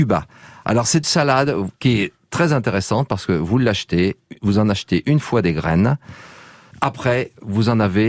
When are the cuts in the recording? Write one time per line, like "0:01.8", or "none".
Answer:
0:01.0
0:01.8